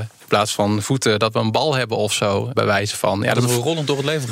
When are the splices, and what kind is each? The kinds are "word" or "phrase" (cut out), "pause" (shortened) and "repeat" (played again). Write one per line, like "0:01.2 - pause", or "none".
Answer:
0:02.5 - word